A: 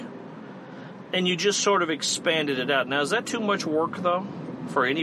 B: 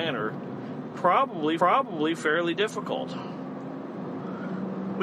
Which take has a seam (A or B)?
B